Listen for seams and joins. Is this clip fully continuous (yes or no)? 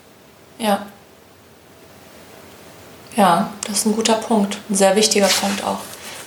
yes